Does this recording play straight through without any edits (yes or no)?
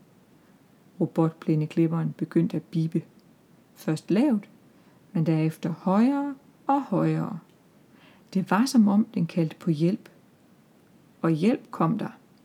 yes